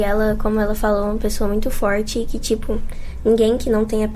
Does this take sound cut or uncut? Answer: uncut